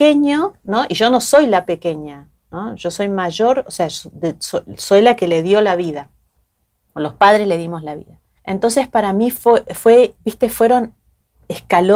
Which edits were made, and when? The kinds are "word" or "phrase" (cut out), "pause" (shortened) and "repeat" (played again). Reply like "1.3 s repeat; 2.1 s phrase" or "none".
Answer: 8.4 s pause; 10.2 s word